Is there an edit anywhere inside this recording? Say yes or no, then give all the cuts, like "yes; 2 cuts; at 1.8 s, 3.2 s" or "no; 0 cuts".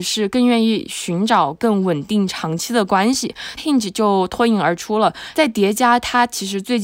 yes; 1 cut; at 3.6 s